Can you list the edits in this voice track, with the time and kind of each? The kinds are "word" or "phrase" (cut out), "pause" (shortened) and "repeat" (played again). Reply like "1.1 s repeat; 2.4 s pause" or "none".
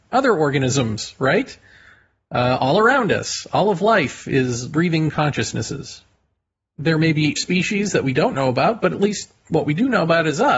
4.7 s word; 7.4 s word